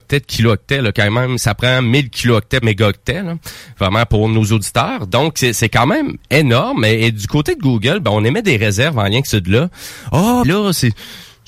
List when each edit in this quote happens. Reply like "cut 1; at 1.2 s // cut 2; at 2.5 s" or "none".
cut 1; at 2.6 s // cut 2; at 9.2 s // cut 3; at 10.4 s